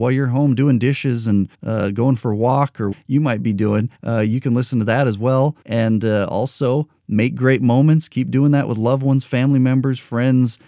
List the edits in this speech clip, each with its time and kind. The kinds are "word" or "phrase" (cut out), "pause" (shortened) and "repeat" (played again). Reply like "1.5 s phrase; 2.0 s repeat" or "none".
1.5 s pause; 2.9 s word; 3.9 s pause; 5.6 s pause